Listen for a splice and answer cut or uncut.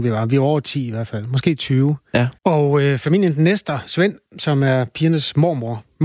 cut